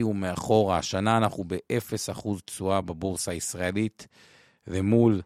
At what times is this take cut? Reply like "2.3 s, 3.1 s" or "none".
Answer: none

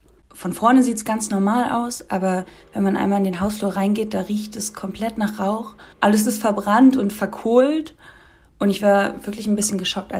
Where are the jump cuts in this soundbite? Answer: 5.9 s

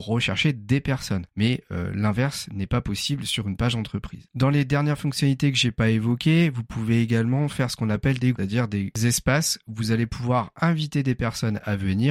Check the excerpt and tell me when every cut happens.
8.3 s

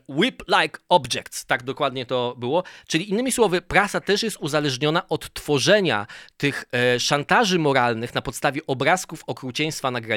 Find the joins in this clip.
none

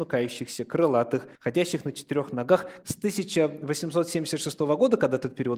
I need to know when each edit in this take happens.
1.4 s, 2.8 s

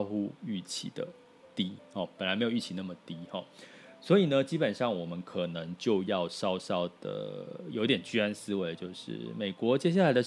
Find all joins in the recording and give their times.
none

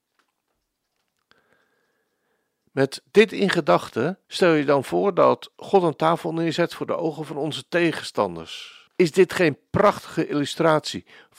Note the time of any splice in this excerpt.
4.2 s, 8.9 s

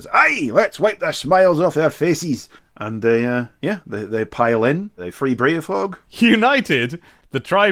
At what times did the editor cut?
2.6 s

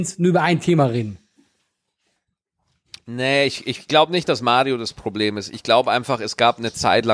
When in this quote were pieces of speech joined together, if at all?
none

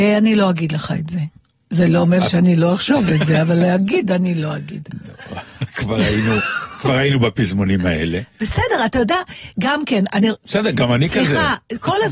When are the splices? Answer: none

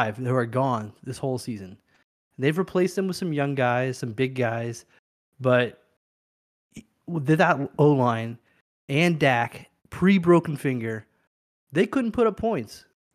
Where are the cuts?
9.8 s

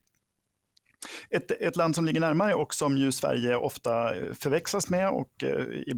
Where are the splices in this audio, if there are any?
none

